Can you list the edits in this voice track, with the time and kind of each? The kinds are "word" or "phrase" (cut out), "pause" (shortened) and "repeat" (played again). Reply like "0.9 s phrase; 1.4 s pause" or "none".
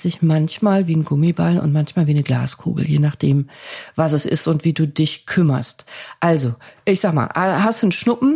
none